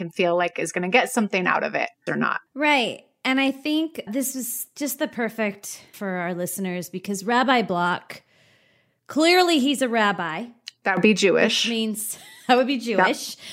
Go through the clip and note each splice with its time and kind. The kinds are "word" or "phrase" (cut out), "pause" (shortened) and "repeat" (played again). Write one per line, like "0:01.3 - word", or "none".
0:02.1 - word
0:02.5 - pause
0:04.1 - word
0:05.9 - phrase